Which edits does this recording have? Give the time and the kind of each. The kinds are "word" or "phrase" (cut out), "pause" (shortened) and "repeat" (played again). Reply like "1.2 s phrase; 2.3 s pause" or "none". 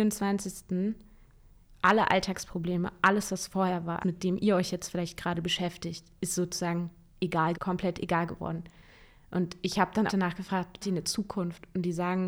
4.0 s word; 7.5 s word; 10.1 s word; 10.8 s word